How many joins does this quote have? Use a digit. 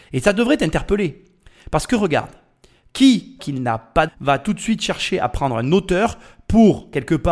2